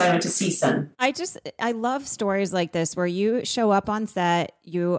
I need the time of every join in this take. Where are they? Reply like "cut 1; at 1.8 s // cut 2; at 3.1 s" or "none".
cut 1; at 0.9 s